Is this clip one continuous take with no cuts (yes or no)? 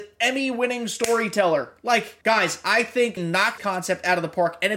no